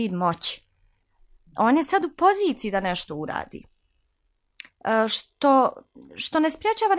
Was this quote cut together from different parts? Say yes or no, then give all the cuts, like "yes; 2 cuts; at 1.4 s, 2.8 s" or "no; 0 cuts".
no; 0 cuts